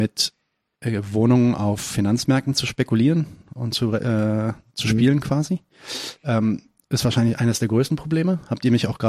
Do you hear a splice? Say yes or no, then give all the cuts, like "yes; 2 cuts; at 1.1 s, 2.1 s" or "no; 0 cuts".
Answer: no; 0 cuts